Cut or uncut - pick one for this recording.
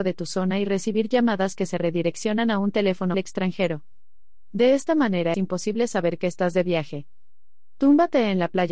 cut